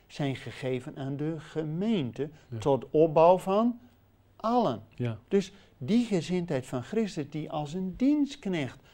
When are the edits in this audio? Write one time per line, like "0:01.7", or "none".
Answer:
0:05.2